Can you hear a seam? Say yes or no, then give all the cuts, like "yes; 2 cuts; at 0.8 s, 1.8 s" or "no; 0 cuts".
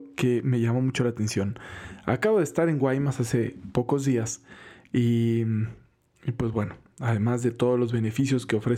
no; 0 cuts